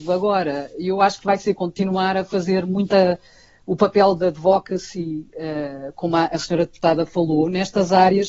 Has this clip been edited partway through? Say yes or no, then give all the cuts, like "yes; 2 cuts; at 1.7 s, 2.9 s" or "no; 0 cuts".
no; 0 cuts